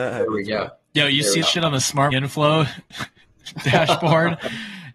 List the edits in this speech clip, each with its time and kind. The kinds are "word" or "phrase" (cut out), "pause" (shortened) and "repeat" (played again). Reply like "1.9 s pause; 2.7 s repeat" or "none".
1.4 s word; 2.1 s word